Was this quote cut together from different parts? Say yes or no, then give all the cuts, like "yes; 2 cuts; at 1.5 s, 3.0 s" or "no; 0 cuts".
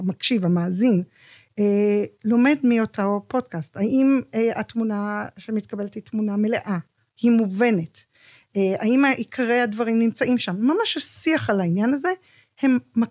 no; 0 cuts